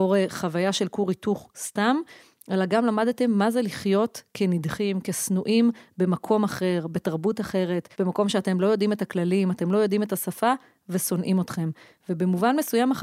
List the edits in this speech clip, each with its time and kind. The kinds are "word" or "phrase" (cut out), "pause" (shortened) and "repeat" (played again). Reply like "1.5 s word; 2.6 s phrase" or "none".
7.9 s pause